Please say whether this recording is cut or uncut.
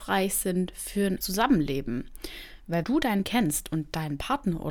cut